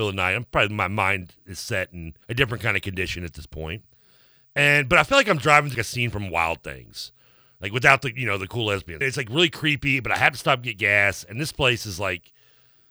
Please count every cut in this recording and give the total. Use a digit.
3